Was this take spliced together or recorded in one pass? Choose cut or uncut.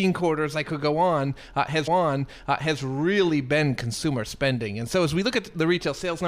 cut